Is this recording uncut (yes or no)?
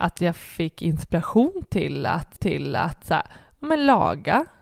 no